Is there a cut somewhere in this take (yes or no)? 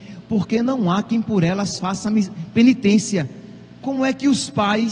no